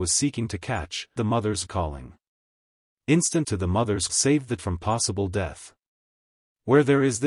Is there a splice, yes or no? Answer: yes